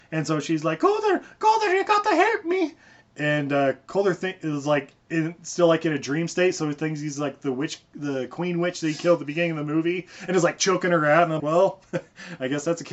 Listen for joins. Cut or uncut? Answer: cut